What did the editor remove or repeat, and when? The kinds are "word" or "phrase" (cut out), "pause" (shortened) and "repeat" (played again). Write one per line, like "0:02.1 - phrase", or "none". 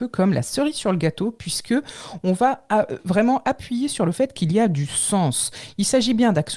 none